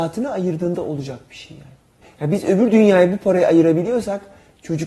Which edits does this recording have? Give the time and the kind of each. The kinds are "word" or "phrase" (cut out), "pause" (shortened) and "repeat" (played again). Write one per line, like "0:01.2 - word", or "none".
0:02.0 - pause